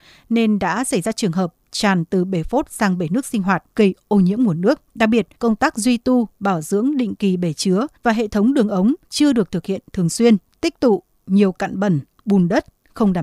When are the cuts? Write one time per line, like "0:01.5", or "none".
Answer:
0:03.7
0:04.9
0:05.3
0:08.0
0:09.0
0:10.5

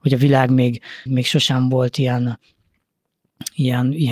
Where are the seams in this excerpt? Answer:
0:01.1

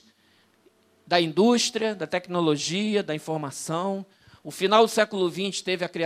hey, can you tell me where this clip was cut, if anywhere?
none

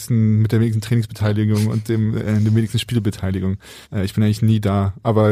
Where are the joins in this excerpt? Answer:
0:03.8

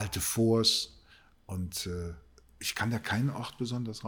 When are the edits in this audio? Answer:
none

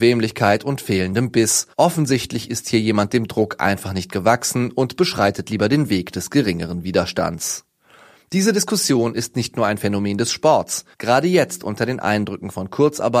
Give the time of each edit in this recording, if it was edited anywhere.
0:01.7
0:10.9

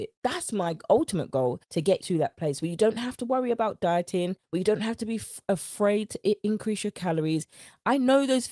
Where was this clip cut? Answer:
0:01.7
0:02.0

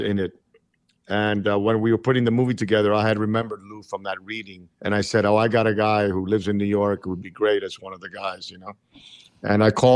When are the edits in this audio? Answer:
0:04.7

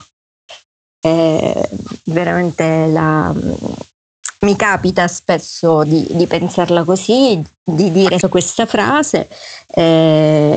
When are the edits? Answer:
0:05.9
0:08.2

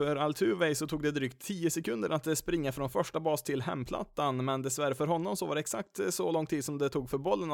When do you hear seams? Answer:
none

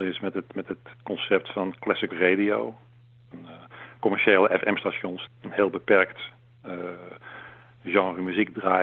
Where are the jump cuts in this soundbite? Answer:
0:00.9
0:02.1
0:03.3
0:04.0
0:05.3

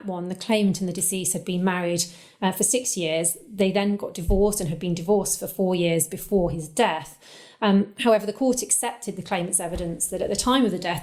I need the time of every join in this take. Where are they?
none

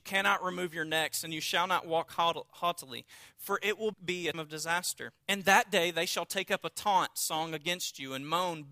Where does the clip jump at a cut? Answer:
0:03.9
0:04.3
0:05.2

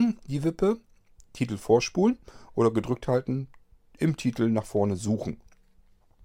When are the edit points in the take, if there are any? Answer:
none

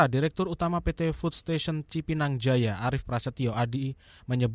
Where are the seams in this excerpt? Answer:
none

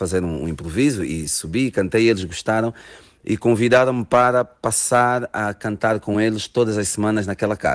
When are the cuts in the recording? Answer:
none

